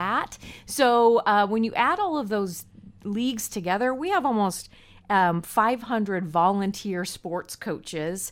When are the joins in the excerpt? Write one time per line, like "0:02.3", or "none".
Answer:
none